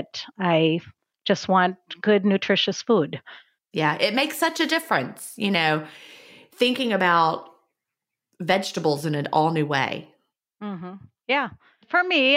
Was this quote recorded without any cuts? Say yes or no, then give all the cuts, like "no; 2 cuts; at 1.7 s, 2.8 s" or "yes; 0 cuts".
yes; 0 cuts